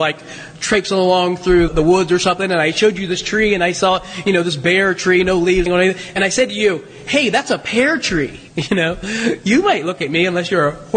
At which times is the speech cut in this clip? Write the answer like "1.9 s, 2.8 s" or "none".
1.7 s, 5.7 s, 8.5 s